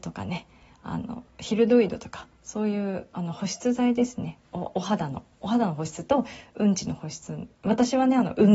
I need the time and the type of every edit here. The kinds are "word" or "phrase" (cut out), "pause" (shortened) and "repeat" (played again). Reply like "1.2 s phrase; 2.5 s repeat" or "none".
2.3 s pause; 7.5 s pause